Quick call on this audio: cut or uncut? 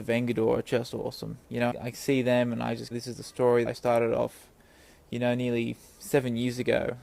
cut